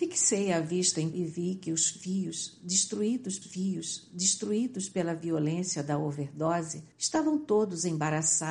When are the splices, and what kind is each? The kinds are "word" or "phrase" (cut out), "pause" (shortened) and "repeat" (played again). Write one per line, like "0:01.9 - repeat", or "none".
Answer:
0:01.1 - word
0:03.4 - repeat
0:06.9 - pause